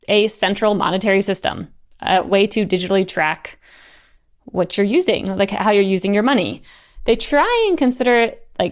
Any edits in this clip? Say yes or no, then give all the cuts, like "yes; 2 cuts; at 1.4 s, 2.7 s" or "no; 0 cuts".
no; 0 cuts